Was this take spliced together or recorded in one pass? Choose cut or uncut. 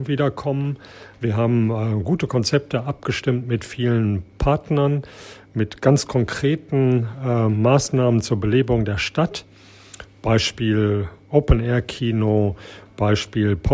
uncut